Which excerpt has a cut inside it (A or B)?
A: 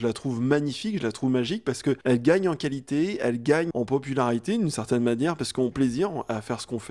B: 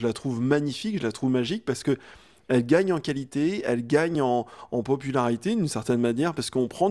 A